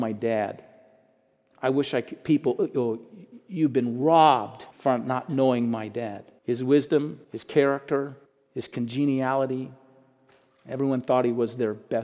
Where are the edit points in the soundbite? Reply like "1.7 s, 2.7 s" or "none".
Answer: 4.7 s, 6.4 s, 7.2 s, 8.3 s